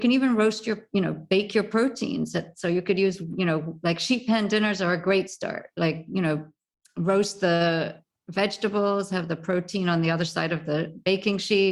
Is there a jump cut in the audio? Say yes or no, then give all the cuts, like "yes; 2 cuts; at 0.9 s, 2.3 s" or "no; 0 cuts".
no; 0 cuts